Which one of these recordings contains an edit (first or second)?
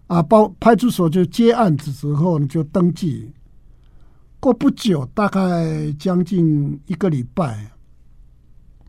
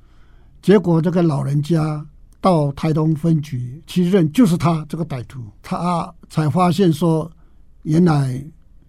second